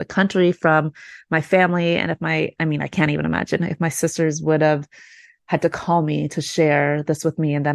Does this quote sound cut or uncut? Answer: uncut